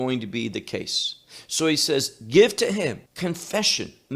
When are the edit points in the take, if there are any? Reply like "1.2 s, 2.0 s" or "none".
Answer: 3.1 s